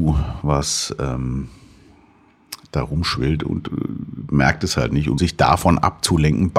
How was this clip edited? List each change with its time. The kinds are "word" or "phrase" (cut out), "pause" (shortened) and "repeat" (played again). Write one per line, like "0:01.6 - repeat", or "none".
0:05.2 - word

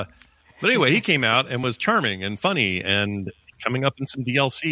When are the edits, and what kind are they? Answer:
0:03.5 - word

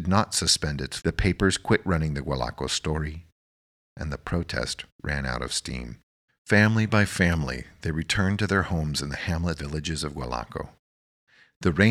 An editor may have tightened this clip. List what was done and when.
0:01.0 - word
0:04.9 - pause
0:06.3 - pause
0:09.6 - word

